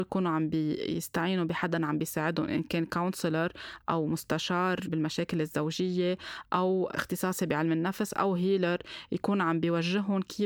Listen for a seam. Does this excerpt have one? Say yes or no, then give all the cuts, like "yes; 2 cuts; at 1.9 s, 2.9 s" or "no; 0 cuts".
no; 0 cuts